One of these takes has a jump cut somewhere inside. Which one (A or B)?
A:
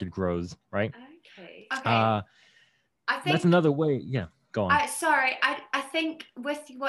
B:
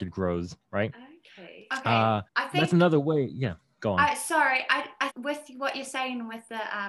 B